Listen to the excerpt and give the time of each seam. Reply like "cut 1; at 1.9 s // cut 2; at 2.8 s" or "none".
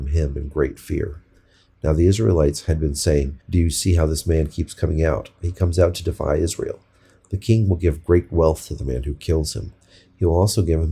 cut 1; at 3.4 s